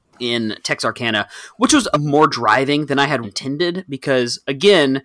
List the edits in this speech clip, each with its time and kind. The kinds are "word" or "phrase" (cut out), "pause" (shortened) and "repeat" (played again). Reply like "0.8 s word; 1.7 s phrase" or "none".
1.9 s phrase; 3.2 s word